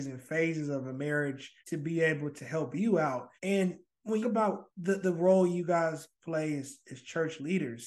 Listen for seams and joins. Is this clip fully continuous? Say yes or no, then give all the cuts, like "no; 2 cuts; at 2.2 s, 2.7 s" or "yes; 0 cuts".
no; 4 cuts; at 1.6 s, 3.4 s, 4.2 s, 4.7 s